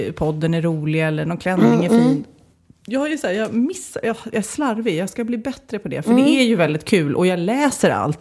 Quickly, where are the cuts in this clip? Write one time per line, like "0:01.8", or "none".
none